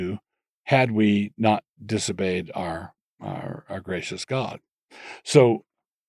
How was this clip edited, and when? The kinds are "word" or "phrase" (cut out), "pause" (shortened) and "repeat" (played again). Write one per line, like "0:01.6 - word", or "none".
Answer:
0:03.0 - pause